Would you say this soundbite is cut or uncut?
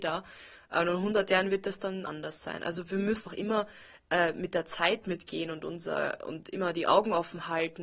cut